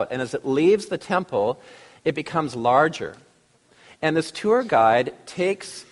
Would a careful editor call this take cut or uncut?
uncut